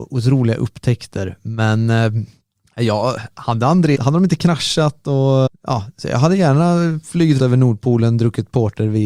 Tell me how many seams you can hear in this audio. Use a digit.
4